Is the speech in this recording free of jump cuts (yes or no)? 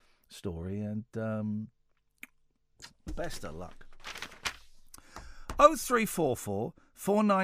no